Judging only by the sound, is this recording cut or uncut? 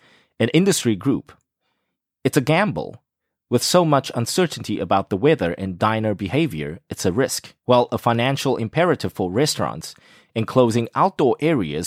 cut